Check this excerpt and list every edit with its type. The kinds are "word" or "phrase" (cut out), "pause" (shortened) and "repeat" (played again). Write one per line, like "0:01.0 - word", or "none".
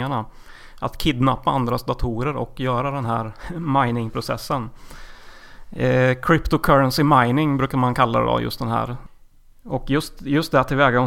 none